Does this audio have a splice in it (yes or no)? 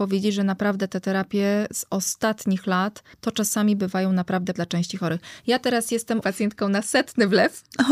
yes